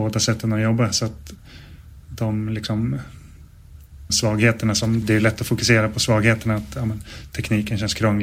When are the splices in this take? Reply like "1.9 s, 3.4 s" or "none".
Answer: 4.1 s, 5.0 s

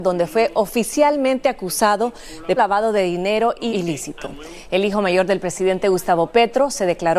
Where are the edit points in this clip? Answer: 2.6 s, 3.7 s

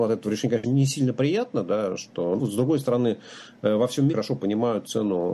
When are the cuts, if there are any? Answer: 2.4 s, 4.1 s

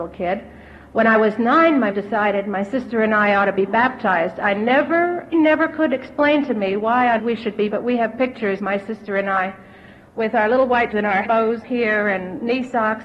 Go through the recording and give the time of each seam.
1.9 s, 5.3 s, 7.2 s, 7.7 s, 8.6 s, 10.9 s, 11.2 s, 11.6 s

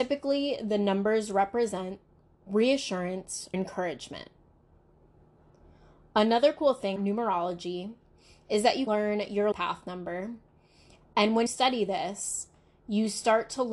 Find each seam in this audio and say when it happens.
3.5 s, 7.0 s, 8.9 s, 9.5 s, 11.5 s

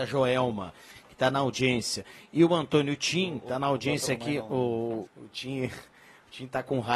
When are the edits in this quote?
5.1 s

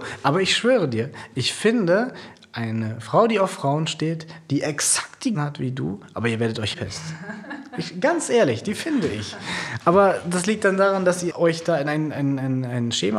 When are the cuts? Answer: 5.3 s, 6.7 s, 11.3 s

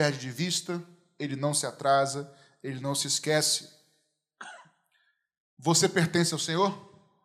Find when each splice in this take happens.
none

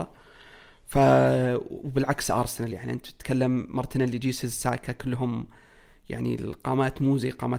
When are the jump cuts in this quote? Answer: none

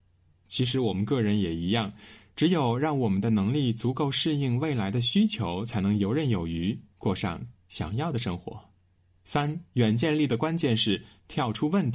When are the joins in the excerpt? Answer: 8.9 s

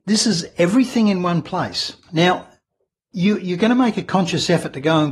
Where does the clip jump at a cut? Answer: 2.0 s

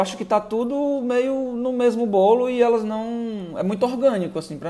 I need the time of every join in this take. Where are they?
none

